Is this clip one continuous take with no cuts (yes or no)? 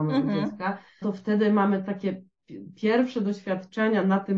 no